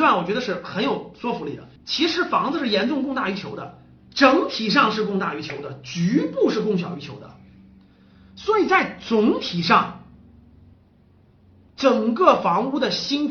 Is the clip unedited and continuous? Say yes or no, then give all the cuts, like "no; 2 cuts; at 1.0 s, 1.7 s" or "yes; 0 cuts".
no; 1 cut; at 1.8 s